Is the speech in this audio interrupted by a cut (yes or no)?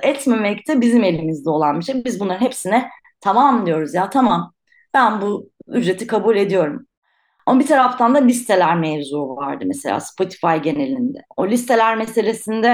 no